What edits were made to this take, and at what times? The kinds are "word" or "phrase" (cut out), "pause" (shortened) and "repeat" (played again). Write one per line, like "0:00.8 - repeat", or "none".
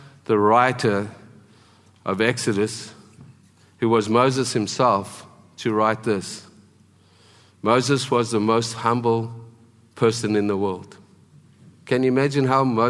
none